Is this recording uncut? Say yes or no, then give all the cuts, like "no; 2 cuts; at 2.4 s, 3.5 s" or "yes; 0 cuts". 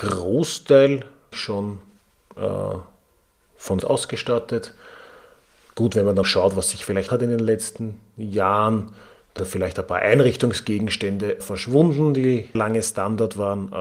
no; 7 cuts; at 1.3 s, 3.8 s, 6.2 s, 7.1 s, 9.4 s, 11.4 s, 12.5 s